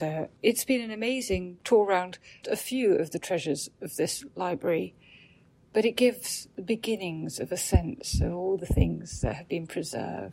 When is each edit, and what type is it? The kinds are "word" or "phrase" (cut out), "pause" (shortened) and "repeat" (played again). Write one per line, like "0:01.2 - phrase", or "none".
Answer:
0:02.4 - word

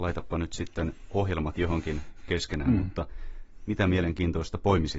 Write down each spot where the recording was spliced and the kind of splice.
0:02.3 - word

